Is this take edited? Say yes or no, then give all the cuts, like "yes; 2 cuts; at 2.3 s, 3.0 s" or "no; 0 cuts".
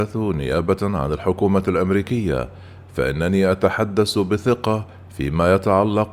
no; 0 cuts